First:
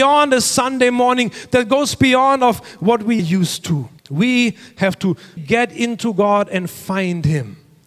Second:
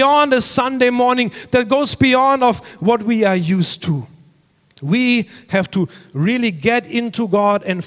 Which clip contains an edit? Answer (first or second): first